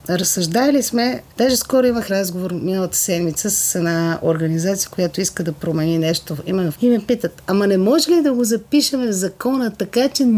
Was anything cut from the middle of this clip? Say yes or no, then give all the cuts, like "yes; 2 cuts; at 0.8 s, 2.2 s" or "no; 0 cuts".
yes; 3 cuts; at 1.3 s, 2.1 s, 6.7 s